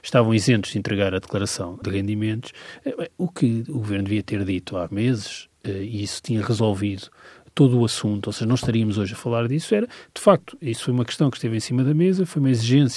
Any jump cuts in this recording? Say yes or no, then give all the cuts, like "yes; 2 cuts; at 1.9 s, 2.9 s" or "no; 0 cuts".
yes; 2 cuts; at 1.8 s, 4.9 s